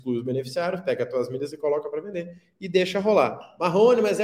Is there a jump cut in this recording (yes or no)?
no